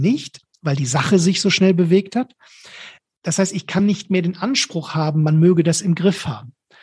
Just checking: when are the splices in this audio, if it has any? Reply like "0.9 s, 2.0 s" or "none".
none

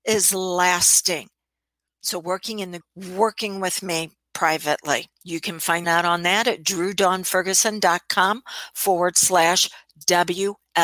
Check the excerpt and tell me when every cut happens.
2.8 s, 5.2 s, 5.8 s

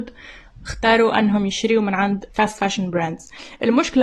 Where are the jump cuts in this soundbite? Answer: 2.3 s

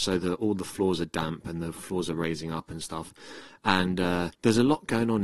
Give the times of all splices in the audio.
4.3 s

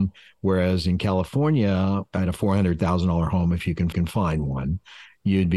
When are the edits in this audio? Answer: 2.1 s, 3.9 s

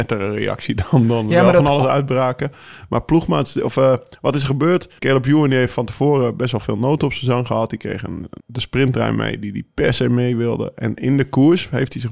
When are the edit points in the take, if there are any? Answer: 5.0 s, 8.4 s

